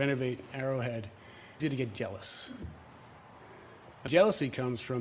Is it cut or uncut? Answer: cut